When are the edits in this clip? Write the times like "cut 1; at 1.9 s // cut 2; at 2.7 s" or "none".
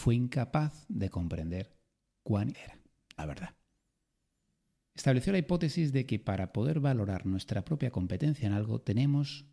cut 1; at 2.5 s // cut 2; at 3.2 s